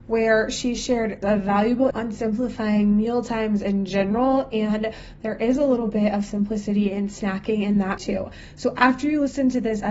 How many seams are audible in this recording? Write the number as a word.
three